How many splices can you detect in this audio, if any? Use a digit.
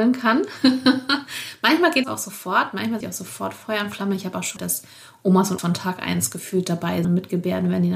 5